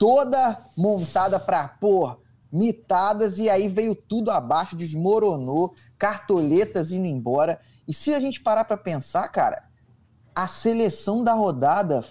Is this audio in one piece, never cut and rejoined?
yes; 0 cuts

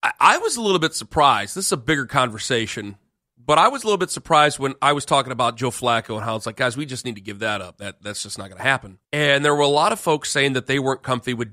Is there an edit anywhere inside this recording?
yes; 1 cut; at 9.0 s

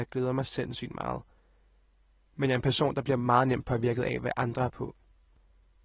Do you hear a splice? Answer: no; 0 cuts

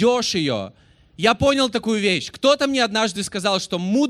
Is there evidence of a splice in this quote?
no; 0 cuts

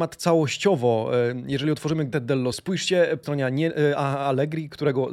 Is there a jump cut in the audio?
yes; 3 cuts; at 2.1 s, 2.5 s, 3.2 s

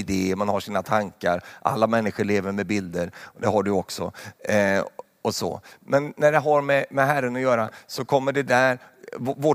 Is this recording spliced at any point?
no; 0 cuts

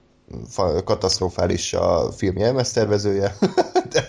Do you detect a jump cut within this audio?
no; 0 cuts

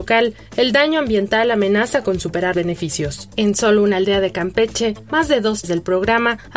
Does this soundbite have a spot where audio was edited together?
yes; 2 cuts; at 2.5 s, 5.6 s

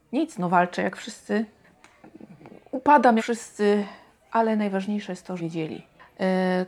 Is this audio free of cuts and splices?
no; 2 cuts; at 3.2 s, 5.4 s

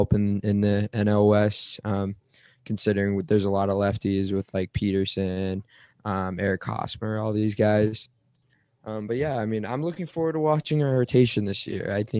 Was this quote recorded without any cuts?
yes; 0 cuts

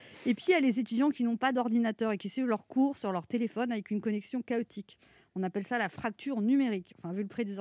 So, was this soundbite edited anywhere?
no; 0 cuts

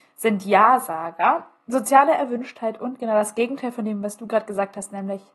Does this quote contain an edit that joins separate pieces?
no; 0 cuts

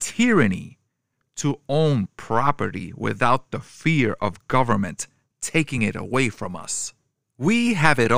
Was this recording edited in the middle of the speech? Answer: no; 0 cuts

